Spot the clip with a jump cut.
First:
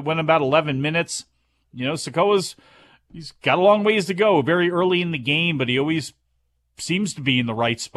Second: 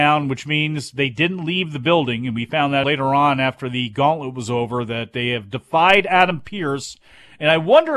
second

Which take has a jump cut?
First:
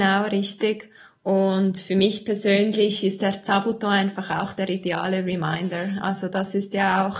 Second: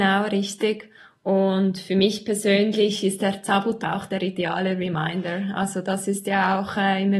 second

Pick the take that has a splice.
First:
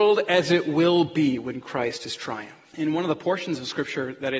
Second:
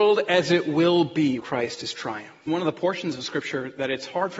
second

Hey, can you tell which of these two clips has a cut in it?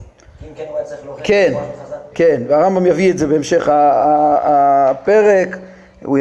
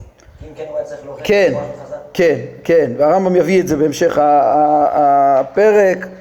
first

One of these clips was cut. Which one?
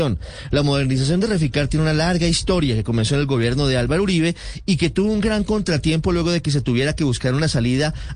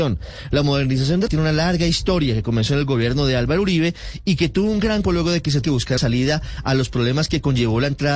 second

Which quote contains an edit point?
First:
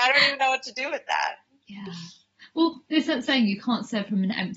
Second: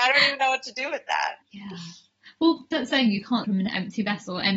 second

